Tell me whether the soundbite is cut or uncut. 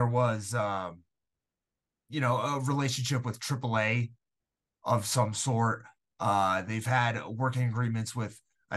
uncut